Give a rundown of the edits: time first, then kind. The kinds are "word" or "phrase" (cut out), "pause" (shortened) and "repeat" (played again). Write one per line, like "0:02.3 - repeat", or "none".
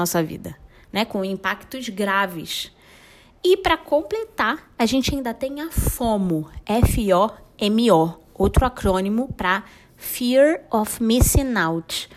none